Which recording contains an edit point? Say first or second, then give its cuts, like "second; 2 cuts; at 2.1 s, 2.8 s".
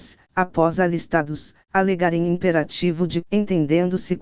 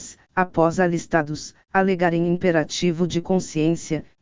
first; 1 cut; at 3.2 s